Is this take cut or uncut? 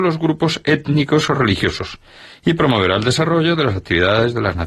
uncut